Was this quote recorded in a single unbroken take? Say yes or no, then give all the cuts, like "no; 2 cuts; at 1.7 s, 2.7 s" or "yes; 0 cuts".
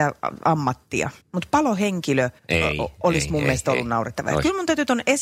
no; 2 cuts; at 1.2 s, 2.4 s